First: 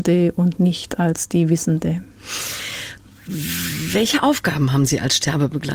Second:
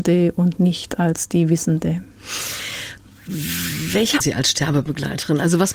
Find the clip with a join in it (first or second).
second